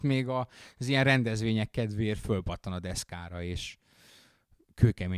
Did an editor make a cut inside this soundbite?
no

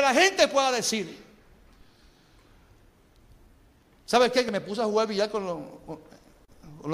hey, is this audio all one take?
yes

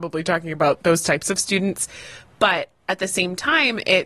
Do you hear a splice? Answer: no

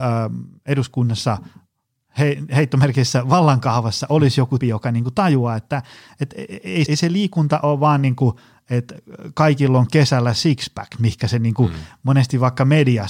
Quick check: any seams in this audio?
yes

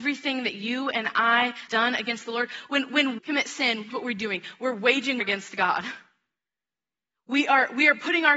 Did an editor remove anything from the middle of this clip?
yes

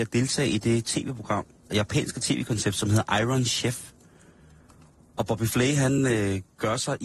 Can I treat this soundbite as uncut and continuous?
yes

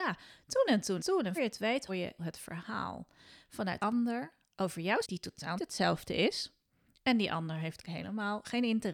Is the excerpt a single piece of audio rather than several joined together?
no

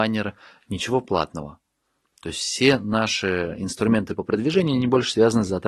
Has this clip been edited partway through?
no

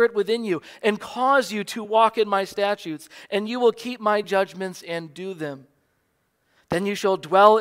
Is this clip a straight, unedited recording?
yes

